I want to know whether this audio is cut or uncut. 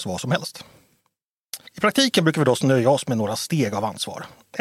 cut